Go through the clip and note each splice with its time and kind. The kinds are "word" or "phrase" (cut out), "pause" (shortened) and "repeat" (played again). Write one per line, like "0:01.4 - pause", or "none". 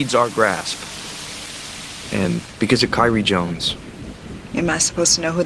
none